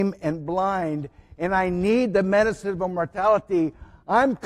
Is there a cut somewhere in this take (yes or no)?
no